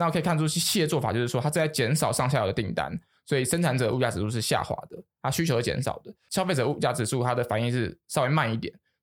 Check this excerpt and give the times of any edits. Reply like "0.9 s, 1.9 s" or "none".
none